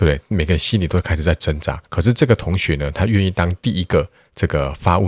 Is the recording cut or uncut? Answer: cut